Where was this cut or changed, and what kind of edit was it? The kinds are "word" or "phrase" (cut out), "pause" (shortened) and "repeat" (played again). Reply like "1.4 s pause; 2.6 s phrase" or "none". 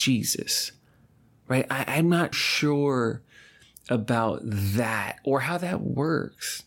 2.3 s word